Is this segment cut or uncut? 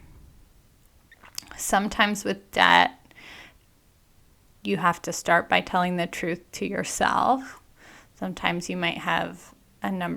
uncut